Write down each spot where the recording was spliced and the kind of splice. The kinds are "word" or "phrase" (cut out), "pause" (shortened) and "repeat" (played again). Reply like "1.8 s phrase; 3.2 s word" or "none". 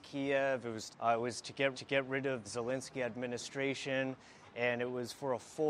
0.9 s phrase; 1.7 s repeat; 2.4 s word